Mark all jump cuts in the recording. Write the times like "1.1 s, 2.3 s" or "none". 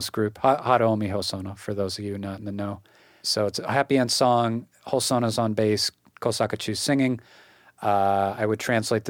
none